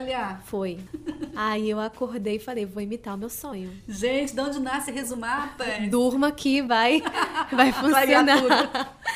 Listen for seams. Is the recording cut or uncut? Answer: uncut